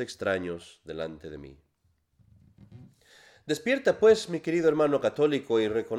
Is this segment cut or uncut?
uncut